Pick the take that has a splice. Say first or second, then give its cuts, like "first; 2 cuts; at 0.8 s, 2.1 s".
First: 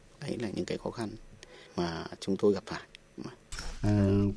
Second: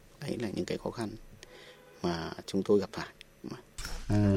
first; 1 cut; at 1.7 s